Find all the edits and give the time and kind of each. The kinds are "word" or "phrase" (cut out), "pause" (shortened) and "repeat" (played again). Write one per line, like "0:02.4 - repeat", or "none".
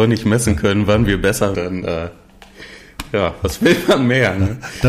0:01.5 - word